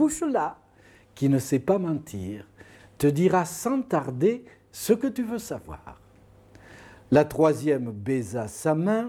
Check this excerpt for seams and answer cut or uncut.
uncut